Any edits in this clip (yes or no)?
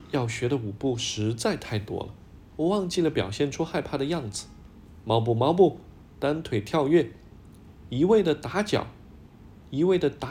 no